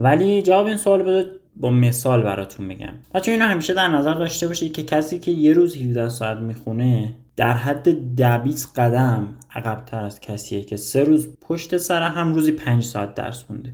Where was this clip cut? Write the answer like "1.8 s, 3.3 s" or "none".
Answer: 1.5 s, 3.0 s, 11.3 s